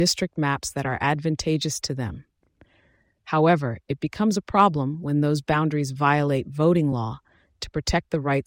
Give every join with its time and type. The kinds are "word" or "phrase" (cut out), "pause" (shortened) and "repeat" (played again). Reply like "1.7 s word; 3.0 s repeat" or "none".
none